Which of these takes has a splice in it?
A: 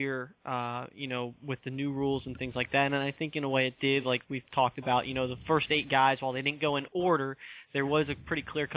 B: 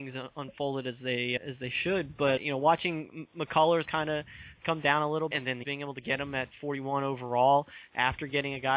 B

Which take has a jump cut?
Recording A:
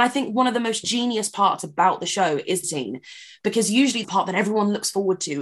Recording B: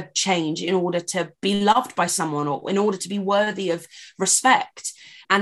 A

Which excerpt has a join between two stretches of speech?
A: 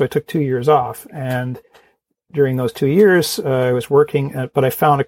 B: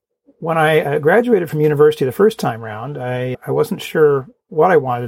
B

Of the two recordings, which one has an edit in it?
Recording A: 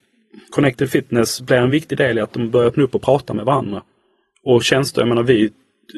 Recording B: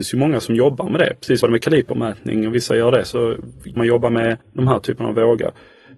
B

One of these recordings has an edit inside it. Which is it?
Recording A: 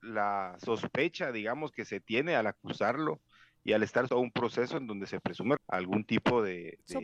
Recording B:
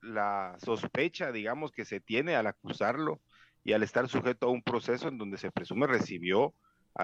A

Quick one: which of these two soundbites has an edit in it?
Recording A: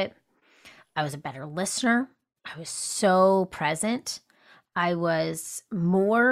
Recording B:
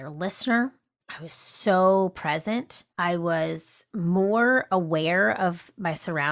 B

